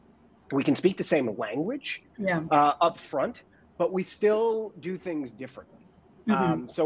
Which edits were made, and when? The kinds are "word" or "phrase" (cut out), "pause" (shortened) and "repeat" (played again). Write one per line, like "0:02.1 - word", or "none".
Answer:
none